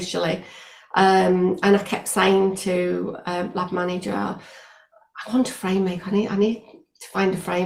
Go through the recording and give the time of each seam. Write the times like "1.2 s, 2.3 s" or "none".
none